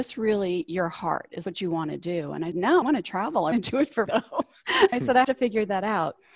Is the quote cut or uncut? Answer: cut